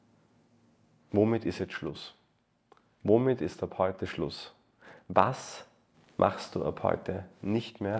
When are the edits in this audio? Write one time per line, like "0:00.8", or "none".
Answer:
none